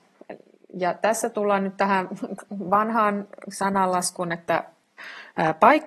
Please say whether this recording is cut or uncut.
uncut